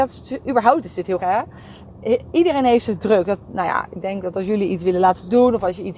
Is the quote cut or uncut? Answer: cut